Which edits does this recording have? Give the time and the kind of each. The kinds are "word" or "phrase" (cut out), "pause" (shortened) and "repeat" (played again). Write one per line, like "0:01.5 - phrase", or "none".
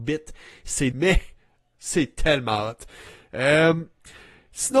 0:00.9 - phrase